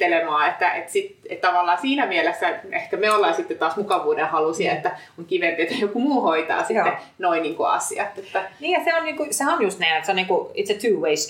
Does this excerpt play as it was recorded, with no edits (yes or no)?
yes